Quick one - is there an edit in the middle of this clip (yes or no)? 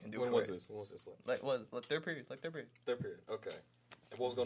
no